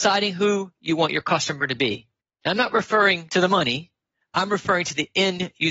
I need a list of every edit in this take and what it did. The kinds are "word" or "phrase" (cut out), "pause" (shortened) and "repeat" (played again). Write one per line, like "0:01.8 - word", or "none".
none